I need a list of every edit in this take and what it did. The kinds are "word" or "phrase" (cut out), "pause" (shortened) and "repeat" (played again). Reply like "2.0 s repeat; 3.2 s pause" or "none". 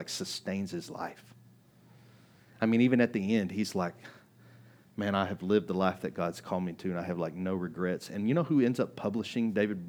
none

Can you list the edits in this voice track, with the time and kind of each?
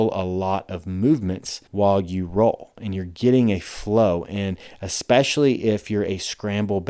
1.7 s pause

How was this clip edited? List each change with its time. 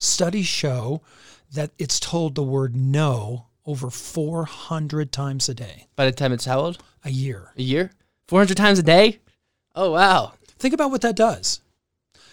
none

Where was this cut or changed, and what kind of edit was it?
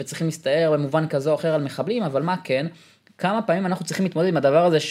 none

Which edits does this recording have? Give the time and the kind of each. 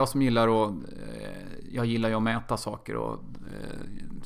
none

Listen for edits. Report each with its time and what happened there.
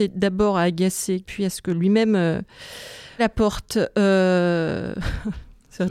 1.2 s word; 3.2 s word

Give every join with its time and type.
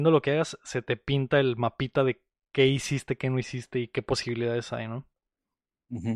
none

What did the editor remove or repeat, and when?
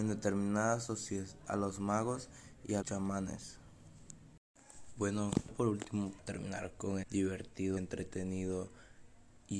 1.4 s word; 2.8 s word; 5.5 s word; 6.2 s word; 7.0 s word; 7.8 s word

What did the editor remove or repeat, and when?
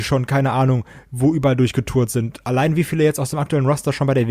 none

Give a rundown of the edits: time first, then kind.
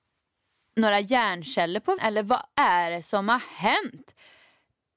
2.0 s word

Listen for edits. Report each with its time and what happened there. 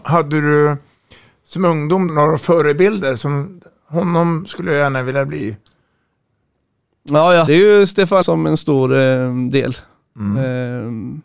2.1 s word; 7.5 s word; 8.2 s word

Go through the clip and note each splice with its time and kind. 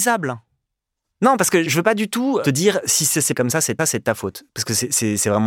1.7 s word; 3.3 s word; 3.8 s repeat

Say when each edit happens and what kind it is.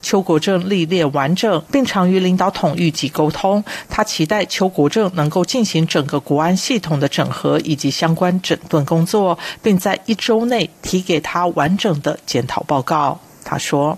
1.7 s phrase

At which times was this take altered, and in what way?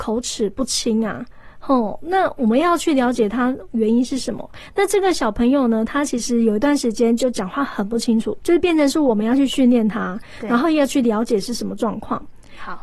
8.4 s word

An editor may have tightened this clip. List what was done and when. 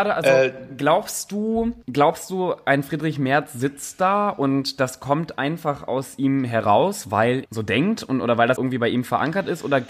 1.8 s pause; 7.5 s word; 8.6 s word

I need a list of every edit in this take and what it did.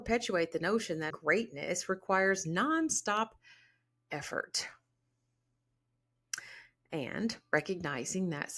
1.1 s word

